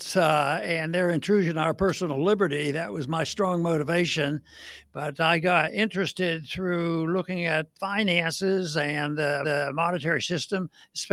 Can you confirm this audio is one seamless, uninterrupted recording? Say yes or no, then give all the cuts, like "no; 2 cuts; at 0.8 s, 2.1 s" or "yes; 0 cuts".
no; 2 cuts; at 7.7 s, 9.4 s